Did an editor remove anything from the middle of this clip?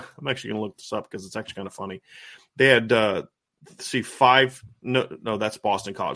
no; 0 cuts

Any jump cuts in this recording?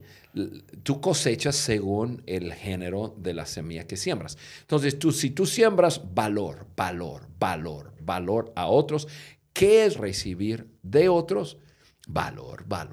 yes; 2 cuts; at 8.0 s, 9.9 s

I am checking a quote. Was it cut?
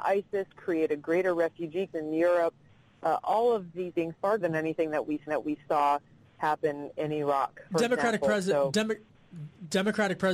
yes; 6 cuts; at 1.9 s, 3.2 s, 3.9 s, 4.4 s, 5.3 s, 7.7 s

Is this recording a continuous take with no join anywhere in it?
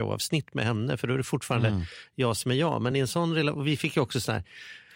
yes; 0 cuts

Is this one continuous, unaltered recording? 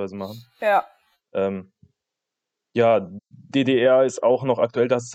yes; 0 cuts

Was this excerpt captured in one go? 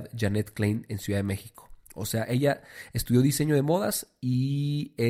yes; 0 cuts

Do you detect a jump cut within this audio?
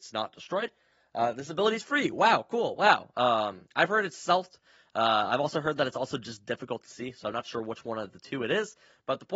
no; 0 cuts

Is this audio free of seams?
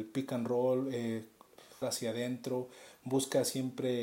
no; 1 cut; at 1.8 s

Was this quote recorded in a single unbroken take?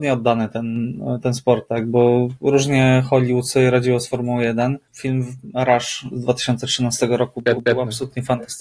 no; 2 cuts; at 4.8 s, 7.5 s

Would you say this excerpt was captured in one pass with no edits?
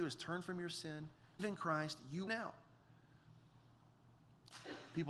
no; 2 cuts; at 1.4 s, 2.3 s

